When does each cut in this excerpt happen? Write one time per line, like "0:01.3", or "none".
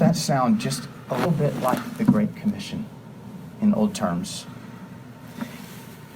0:01.2
0:03.5
0:03.9